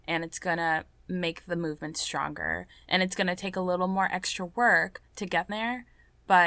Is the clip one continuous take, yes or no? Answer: no